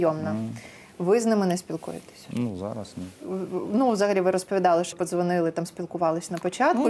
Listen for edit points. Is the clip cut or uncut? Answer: cut